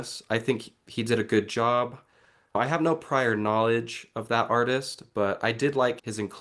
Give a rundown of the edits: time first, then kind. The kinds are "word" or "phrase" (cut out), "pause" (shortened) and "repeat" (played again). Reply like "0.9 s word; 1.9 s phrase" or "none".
none